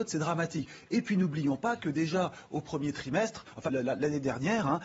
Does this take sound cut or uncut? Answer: cut